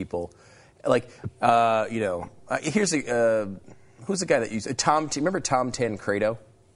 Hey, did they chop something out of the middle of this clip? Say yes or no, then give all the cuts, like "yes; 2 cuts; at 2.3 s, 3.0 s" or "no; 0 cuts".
no; 0 cuts